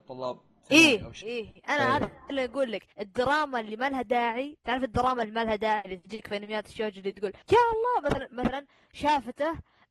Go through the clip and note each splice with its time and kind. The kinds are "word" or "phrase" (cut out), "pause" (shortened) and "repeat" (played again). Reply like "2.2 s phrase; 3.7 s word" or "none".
1.2 s word; 2.9 s pause; 7.4 s pause; 8.3 s word